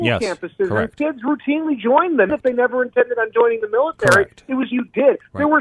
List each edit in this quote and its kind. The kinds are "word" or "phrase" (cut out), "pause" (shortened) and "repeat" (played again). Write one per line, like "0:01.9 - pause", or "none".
0:02.3 - word
0:04.7 - phrase